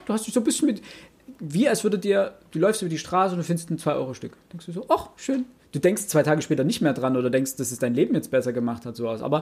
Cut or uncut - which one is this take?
uncut